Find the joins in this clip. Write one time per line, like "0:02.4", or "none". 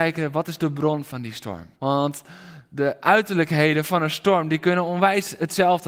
0:01.7